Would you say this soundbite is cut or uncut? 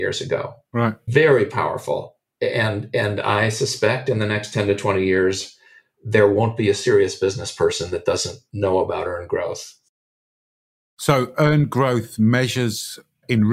uncut